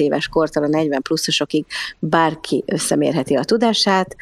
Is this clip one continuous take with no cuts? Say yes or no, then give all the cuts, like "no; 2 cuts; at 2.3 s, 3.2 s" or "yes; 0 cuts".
yes; 0 cuts